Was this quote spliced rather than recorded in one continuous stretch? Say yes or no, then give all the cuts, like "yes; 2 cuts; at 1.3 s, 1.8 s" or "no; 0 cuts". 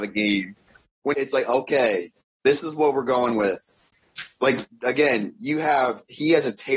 yes; 2 cuts; at 1.1 s, 2.2 s